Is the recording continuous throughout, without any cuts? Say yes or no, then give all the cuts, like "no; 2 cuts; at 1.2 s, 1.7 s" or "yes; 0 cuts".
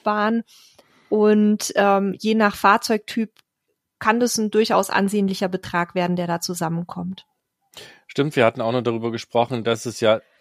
yes; 0 cuts